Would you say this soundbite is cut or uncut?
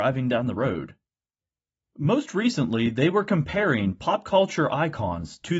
uncut